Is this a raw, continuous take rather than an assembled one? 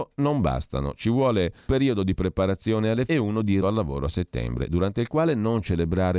no; 3 cuts; at 1.7 s, 3.1 s, 3.6 s

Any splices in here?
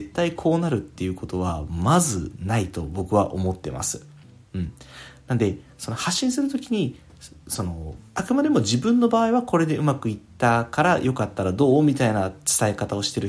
yes; 1 cut; at 8.1 s

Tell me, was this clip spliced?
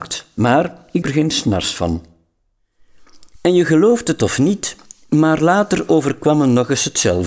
yes; 1 cut; at 1.0 s

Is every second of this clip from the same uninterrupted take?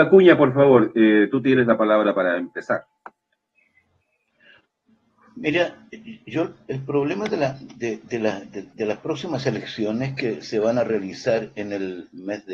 yes; 0 cuts

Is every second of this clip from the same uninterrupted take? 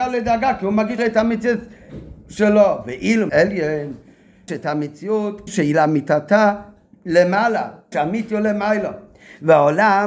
no; 5 cuts; at 1.0 s, 3.3 s, 4.5 s, 5.5 s, 7.9 s

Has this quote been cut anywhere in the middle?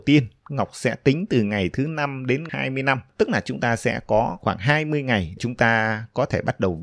yes; 2 cuts; at 2.5 s, 5.4 s

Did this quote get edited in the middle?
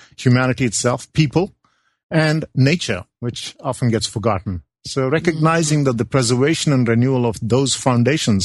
no; 0 cuts

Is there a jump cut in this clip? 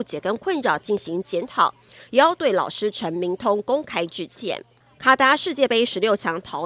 no; 0 cuts

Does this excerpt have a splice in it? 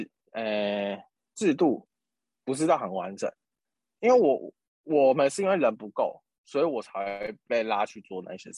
no; 0 cuts

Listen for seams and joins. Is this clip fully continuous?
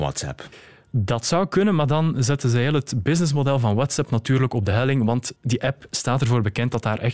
no; 1 cut; at 5.4 s

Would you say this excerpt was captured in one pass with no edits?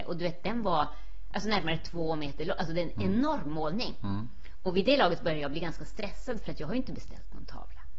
yes; 0 cuts

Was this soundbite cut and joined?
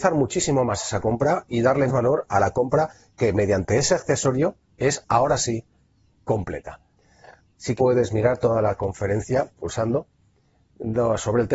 yes; 2 cuts; at 1.9 s, 7.8 s

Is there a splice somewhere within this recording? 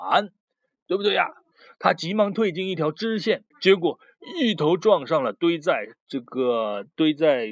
yes; 3 cuts; at 1.5 s, 3.5 s, 6.0 s

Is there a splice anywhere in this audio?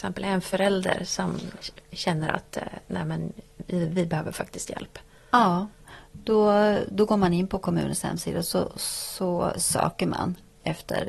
no; 0 cuts

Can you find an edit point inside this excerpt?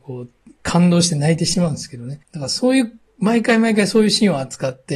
yes; 1 cut; at 2.2 s

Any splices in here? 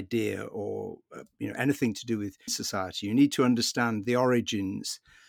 yes; 1 cut; at 2.5 s

